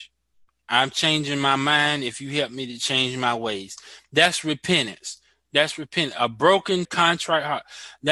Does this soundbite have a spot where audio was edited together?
yes; 1 cut; at 6.8 s

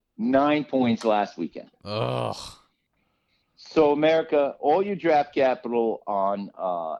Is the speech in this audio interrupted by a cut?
no; 0 cuts

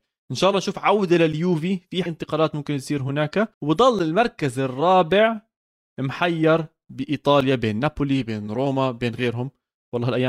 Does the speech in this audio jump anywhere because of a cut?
yes; 2 cuts; at 2.1 s, 3.5 s

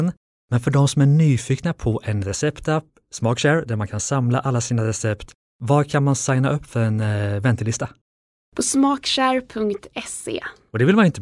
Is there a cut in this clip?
no; 0 cuts

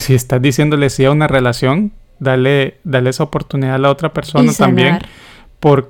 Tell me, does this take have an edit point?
no; 0 cuts

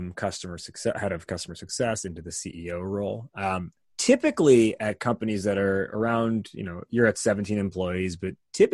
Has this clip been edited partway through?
no; 0 cuts

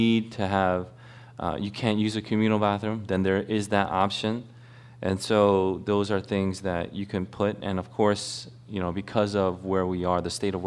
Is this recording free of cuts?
yes; 0 cuts

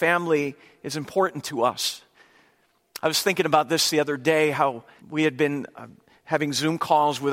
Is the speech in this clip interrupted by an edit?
yes; 1 cut; at 5.0 s

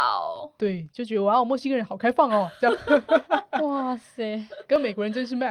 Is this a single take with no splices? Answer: yes; 0 cuts

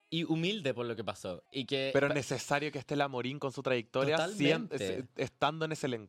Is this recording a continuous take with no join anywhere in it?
no; 1 cut; at 1.5 s

